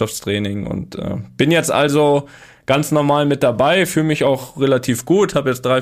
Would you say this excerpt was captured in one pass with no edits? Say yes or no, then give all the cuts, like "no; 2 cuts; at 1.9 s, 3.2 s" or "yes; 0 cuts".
yes; 0 cuts